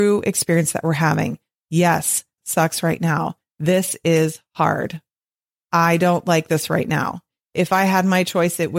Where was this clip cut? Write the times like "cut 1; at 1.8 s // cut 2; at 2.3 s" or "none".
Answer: cut 1; at 2.4 s